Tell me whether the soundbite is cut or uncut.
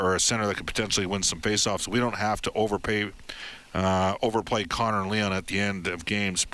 uncut